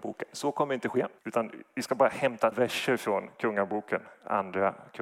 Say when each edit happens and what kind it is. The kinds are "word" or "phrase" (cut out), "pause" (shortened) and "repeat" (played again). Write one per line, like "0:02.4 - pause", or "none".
0:01.2 - pause
0:02.5 - word

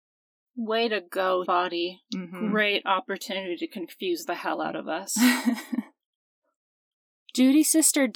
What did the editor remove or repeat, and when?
0:01.4 - word

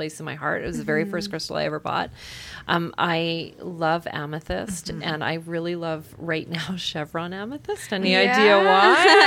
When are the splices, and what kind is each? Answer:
none

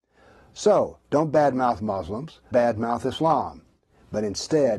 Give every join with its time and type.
0:02.5 - word

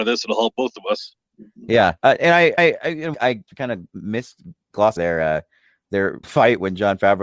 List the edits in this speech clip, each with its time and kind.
0:02.0 - pause
0:02.6 - repeat
0:03.1 - phrase
0:03.5 - word
0:05.0 - word
0:06.2 - word

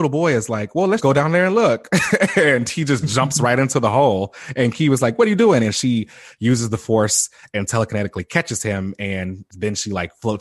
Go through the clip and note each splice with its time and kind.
0:01.0 - word
0:09.5 - pause

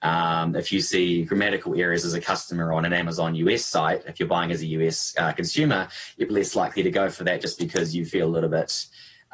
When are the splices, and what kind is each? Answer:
0:06.3 - word

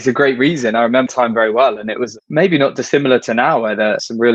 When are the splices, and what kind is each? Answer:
0:01.1 - word

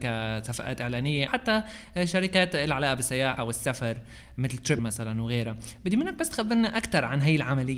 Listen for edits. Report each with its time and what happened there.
0:01.3 - word
0:03.4 - word
0:04.8 - word

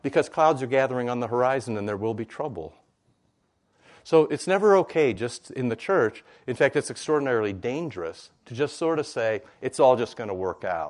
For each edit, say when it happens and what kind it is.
none

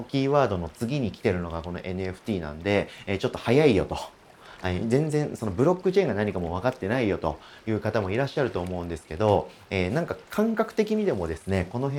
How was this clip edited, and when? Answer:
none

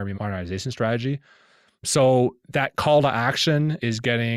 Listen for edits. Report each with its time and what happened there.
none

